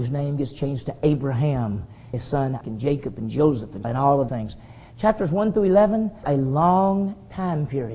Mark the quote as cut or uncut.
cut